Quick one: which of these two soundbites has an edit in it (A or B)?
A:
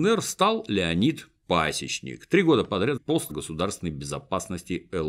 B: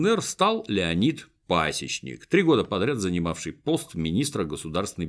A